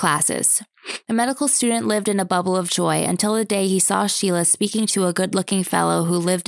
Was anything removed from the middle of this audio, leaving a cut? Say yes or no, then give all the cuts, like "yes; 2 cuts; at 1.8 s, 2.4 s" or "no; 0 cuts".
no; 0 cuts